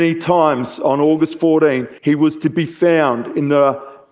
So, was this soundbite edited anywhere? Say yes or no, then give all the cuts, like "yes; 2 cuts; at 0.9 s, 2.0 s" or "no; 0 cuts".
yes; 1 cut; at 2.0 s